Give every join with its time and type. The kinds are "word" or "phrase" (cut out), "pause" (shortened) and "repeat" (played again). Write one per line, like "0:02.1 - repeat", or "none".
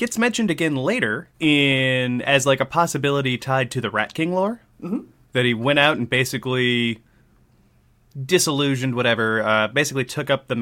0:01.3 - pause
0:04.7 - pause